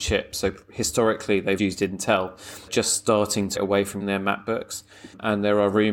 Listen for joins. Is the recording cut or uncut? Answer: cut